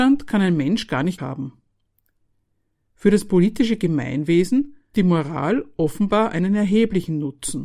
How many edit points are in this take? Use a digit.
2